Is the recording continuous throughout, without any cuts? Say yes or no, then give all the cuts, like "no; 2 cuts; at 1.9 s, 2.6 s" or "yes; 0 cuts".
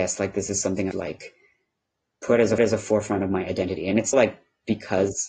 no; 3 cuts; at 0.9 s, 2.6 s, 4.1 s